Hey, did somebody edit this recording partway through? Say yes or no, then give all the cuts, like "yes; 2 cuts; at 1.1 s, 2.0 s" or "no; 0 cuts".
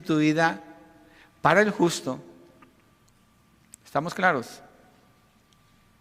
no; 0 cuts